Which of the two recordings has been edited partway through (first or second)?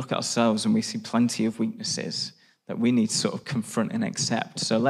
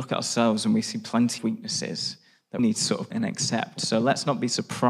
second